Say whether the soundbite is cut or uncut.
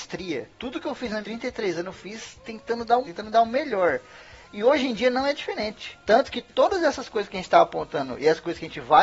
cut